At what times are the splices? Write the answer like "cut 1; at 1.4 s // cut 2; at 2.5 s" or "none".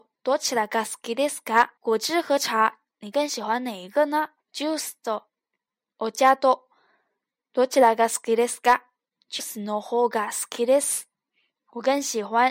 cut 1; at 1.8 s // cut 2; at 4.4 s // cut 3; at 9.4 s